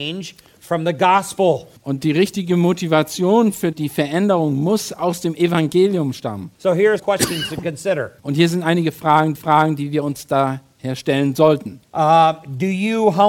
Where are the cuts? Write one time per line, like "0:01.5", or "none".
0:01.8
0:03.7
0:06.5
0:07.0
0:08.2
0:09.4
0:11.9